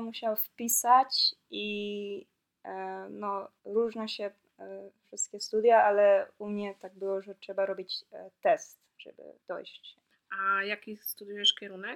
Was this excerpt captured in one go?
no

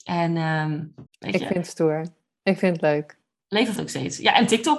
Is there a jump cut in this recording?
yes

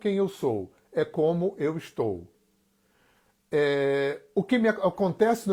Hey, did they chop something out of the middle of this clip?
no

